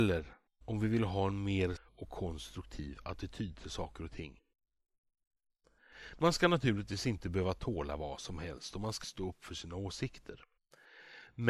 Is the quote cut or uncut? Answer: cut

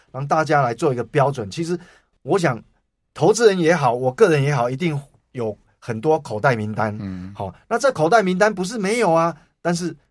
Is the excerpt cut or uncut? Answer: uncut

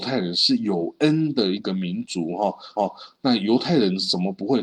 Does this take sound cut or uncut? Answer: cut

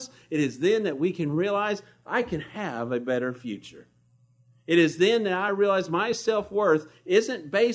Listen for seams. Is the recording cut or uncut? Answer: uncut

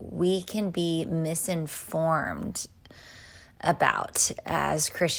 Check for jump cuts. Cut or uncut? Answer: uncut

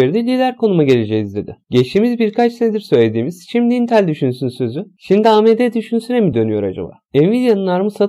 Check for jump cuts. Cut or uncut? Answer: uncut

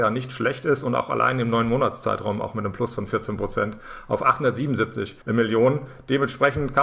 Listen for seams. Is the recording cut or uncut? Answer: cut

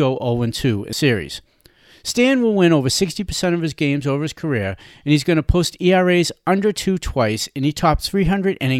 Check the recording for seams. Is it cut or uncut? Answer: cut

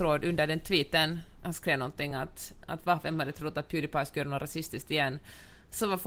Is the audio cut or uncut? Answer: uncut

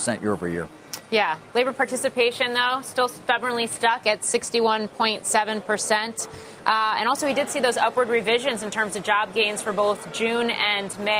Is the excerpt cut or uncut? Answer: uncut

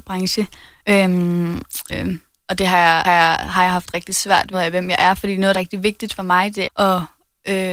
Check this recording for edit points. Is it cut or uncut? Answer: cut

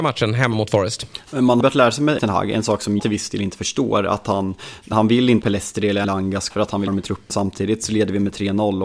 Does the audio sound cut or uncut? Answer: cut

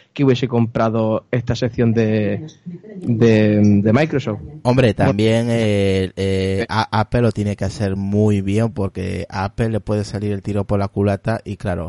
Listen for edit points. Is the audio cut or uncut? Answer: uncut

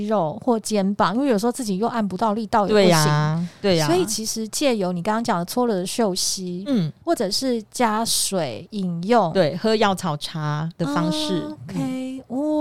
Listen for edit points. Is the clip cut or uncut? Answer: uncut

